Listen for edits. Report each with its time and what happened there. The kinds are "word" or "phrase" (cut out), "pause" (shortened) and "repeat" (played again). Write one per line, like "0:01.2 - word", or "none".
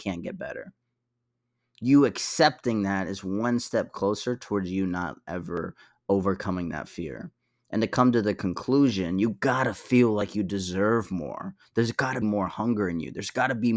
0:12.2 - word